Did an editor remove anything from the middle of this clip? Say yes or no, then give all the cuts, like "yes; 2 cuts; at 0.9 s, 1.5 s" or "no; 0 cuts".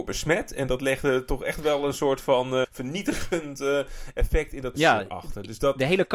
yes; 2 cuts; at 2.6 s, 4.7 s